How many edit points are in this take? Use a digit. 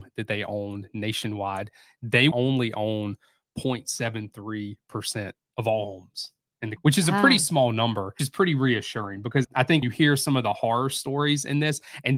5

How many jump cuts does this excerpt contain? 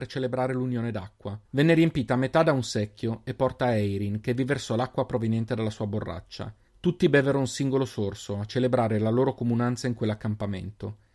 2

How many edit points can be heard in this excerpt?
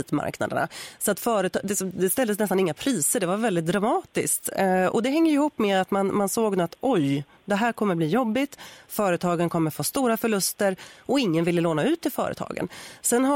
0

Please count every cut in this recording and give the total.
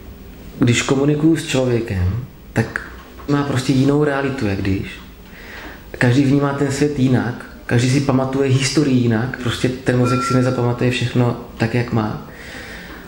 2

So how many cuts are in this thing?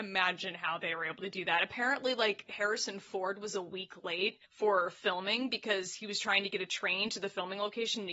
1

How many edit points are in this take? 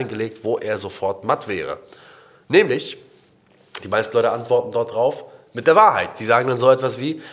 0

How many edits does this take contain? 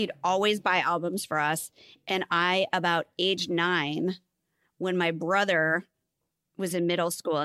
0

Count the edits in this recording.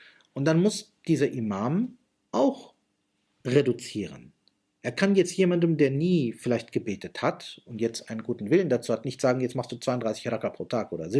0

